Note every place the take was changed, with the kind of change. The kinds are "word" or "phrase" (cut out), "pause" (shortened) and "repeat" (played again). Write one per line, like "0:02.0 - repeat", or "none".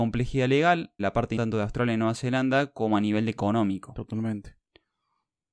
0:01.0 - word
0:01.4 - word

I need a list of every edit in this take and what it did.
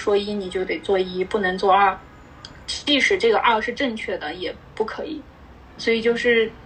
none

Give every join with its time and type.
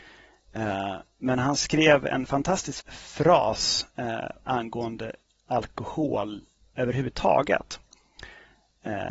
0:02.8 - word

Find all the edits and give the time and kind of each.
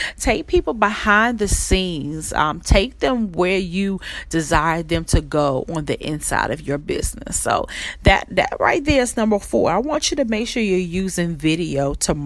none

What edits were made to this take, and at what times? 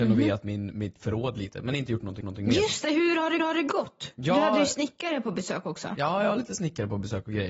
0:02.2 - repeat
0:03.4 - repeat

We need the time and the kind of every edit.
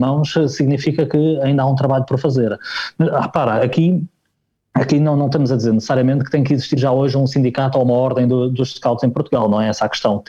none

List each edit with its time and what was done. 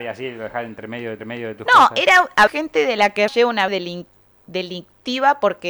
0:01.2 - repeat
0:02.5 - phrase
0:03.3 - word
0:03.7 - word

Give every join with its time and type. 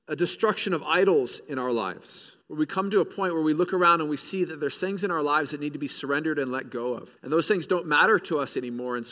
0:02.4 - pause
0:07.2 - pause

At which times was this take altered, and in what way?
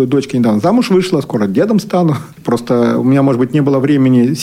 none

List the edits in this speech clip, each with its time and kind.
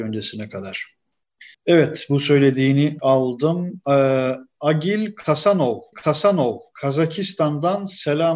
0:01.5 - pause
0:03.0 - phrase
0:05.9 - repeat

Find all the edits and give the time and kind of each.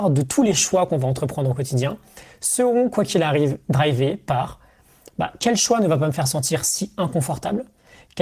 none

